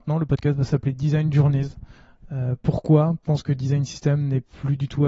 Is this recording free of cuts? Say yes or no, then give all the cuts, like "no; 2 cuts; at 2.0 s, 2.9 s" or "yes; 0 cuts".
no; 1 cut; at 3.2 s